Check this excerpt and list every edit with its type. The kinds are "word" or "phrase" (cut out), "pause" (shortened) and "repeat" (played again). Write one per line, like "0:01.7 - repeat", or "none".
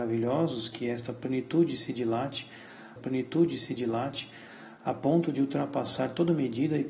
0:03.0 - repeat